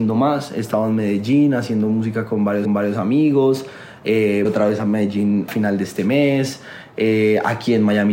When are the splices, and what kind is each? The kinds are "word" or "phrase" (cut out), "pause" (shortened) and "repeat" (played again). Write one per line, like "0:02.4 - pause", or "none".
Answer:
0:02.7 - repeat
0:04.5 - word
0:05.5 - word